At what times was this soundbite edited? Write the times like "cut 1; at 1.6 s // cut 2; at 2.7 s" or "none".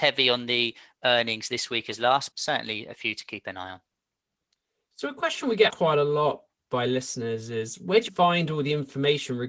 cut 1; at 2.3 s // cut 2; at 5.7 s // cut 3; at 8.1 s